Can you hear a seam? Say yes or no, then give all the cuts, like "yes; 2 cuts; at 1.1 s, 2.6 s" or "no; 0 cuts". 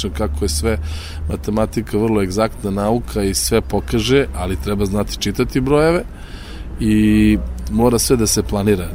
no; 0 cuts